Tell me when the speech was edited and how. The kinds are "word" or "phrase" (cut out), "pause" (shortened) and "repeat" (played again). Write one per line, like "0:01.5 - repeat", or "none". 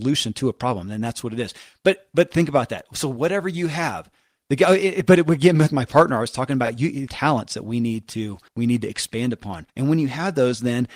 0:07.1 - phrase
0:08.5 - pause
0:09.7 - pause